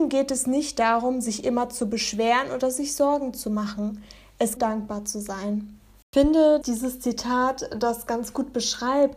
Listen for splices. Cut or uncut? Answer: cut